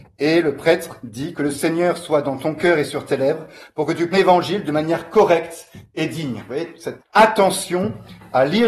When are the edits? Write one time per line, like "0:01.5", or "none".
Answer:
0:04.1
0:07.0